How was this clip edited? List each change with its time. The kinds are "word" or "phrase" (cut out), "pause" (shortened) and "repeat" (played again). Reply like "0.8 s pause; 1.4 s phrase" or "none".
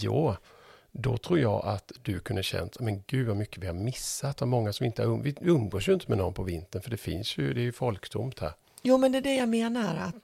none

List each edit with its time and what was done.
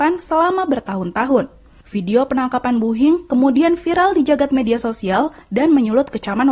none

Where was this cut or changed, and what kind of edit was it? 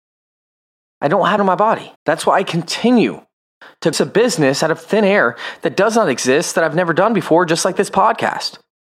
1.4 s phrase; 2.0 s pause; 3.9 s phrase

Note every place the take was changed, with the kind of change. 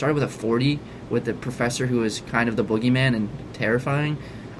none

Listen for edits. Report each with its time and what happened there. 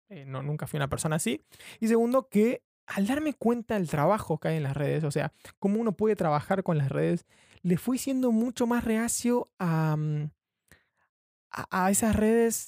none

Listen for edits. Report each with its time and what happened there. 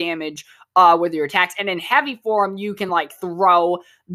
none

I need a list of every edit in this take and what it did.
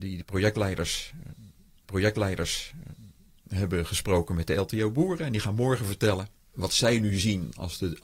1.8 s repeat; 6.5 s word

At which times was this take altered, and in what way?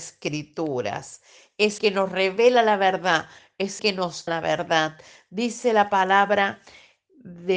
1.8 s word; 3.8 s word; 4.3 s word

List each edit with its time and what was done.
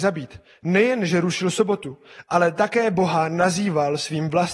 none

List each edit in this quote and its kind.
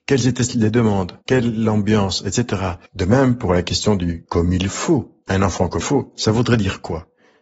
1.2 s pause; 2.9 s pause; 5.8 s word

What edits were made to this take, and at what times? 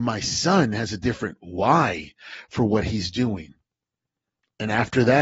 none

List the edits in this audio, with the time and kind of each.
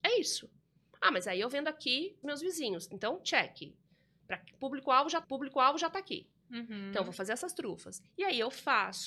2.2 s phrase; 5.2 s repeat

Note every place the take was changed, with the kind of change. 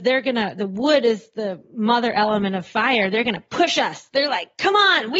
none

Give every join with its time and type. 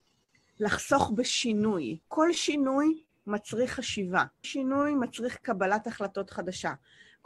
2.0 s pause; 4.4 s word

